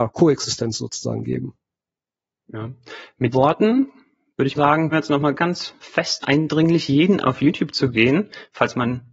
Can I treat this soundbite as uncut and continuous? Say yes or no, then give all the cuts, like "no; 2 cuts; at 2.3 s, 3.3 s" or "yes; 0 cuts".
no; 6 cuts; at 3.3 s, 4.5 s, 4.9 s, 5.3 s, 6.2 s, 7.2 s